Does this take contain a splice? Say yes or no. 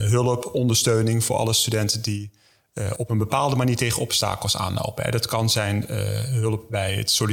no